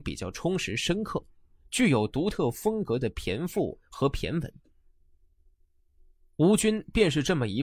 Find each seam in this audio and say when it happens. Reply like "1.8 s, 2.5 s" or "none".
none